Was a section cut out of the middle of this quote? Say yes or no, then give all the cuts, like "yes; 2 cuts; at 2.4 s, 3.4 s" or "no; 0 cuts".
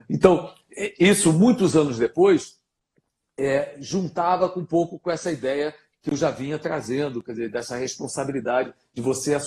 no; 0 cuts